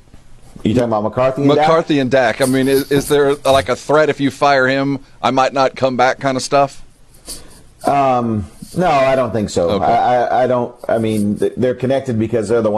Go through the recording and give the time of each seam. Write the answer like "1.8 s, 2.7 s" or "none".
none